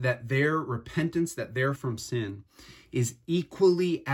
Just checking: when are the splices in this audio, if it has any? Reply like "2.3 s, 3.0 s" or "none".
1.8 s